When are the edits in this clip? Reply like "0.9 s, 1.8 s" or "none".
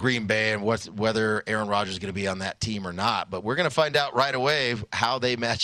none